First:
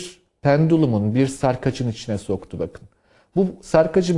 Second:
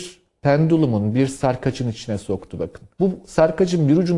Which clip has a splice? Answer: second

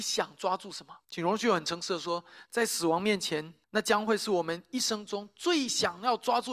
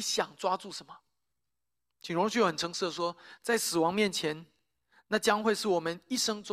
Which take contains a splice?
first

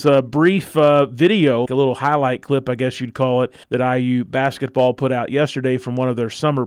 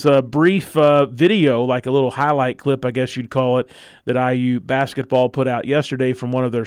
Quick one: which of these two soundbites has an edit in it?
first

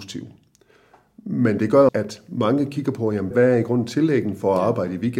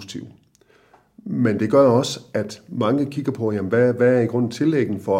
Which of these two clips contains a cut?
first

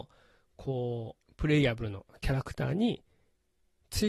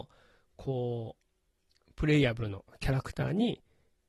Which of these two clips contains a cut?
first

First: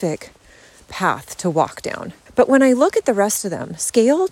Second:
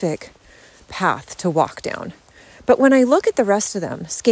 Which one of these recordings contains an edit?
first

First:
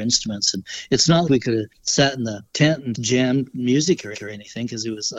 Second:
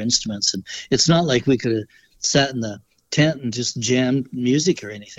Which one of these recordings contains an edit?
first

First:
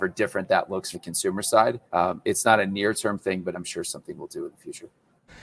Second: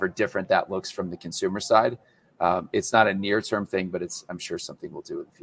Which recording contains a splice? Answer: first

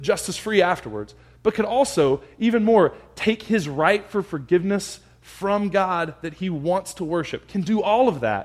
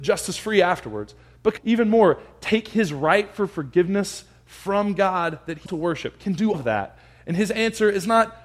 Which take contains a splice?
second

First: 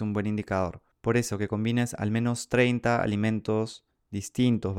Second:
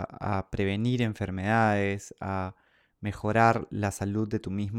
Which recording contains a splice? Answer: first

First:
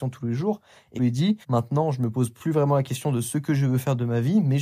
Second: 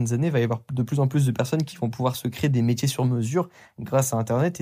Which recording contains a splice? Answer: first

